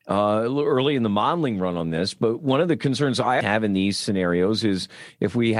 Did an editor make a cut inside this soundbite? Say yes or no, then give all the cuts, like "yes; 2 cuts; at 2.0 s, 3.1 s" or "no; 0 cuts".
yes; 1 cut; at 3.4 s